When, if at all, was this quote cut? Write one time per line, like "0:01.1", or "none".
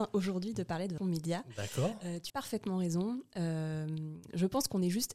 0:01.0
0:02.3